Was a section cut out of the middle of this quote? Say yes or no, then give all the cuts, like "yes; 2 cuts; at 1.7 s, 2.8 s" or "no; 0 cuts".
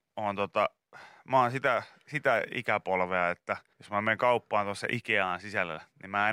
yes; 1 cut; at 3.7 s